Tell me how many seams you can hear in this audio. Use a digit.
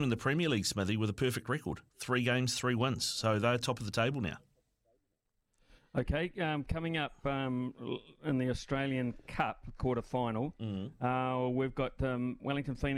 1